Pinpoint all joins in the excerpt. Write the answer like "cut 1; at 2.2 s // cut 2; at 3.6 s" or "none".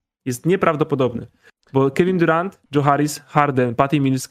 cut 1; at 2.7 s